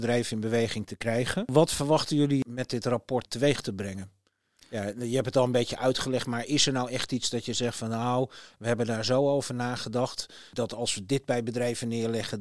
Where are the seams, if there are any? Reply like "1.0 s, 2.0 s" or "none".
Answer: none